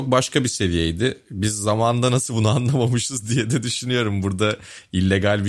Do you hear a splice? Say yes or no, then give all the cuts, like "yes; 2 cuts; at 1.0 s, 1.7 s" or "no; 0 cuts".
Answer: no; 0 cuts